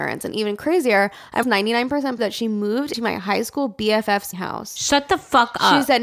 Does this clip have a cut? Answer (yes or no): yes